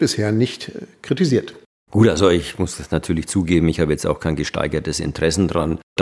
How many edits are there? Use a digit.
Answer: 0